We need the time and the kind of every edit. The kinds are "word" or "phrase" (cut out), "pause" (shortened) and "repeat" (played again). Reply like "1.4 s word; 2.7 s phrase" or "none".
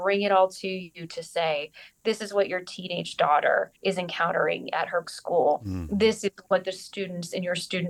3.8 s pause; 5.0 s word